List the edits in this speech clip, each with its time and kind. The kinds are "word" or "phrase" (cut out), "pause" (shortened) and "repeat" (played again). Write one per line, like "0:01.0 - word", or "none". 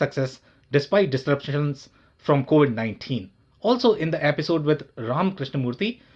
none